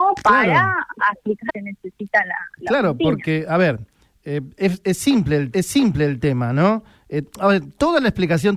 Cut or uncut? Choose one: cut